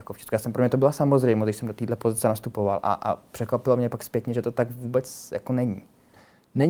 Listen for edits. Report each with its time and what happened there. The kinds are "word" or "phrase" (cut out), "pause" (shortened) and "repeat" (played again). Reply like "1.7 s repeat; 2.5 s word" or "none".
none